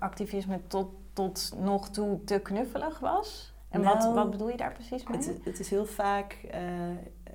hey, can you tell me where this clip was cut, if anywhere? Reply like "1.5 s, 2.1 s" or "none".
none